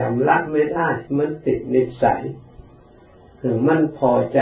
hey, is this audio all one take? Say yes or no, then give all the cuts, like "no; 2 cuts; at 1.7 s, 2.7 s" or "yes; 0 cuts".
no; 1 cut; at 1.1 s